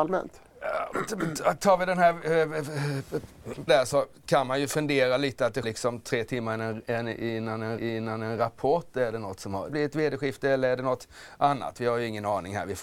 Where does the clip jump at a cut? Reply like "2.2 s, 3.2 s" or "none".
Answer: 3.7 s, 5.6 s, 7.8 s, 9.7 s